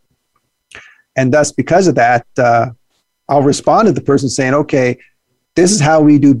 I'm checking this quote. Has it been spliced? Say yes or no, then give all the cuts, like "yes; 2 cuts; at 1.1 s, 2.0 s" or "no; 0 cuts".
no; 0 cuts